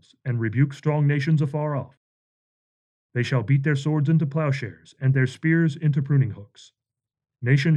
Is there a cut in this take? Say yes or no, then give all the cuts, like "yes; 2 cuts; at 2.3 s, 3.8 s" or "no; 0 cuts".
no; 0 cuts